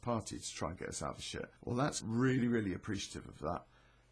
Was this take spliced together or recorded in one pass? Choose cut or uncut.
cut